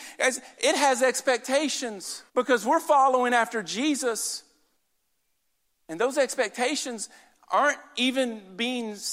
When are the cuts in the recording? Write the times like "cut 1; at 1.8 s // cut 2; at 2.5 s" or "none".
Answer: cut 1; at 2.3 s // cut 2; at 4.8 s

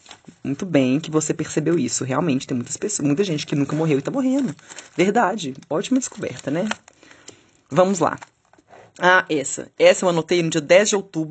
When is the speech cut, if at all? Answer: none

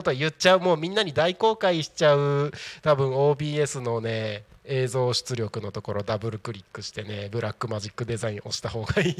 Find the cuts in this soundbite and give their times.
none

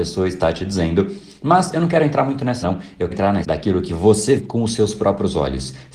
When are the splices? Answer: cut 1; at 2.6 s // cut 2; at 3.1 s // cut 3; at 3.4 s // cut 4; at 4.4 s

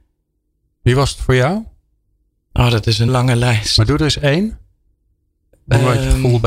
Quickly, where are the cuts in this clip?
cut 1; at 3.1 s

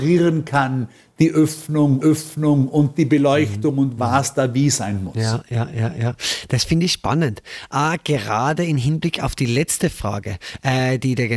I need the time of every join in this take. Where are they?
cut 1; at 2.0 s

